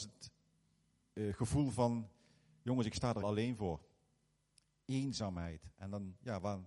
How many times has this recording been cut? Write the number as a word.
one